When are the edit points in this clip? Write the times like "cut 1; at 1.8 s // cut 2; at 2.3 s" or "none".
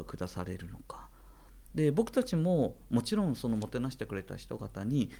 cut 1; at 1.6 s